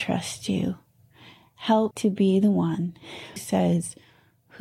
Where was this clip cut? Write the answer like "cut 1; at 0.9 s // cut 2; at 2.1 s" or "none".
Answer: cut 1; at 1.9 s // cut 2; at 3.4 s